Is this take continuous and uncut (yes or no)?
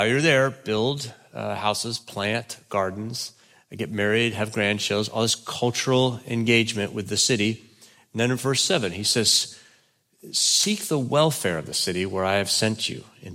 yes